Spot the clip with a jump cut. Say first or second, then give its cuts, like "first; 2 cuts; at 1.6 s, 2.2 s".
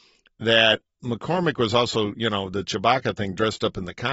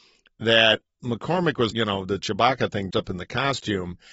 second; 2 cuts; at 1.7 s, 2.9 s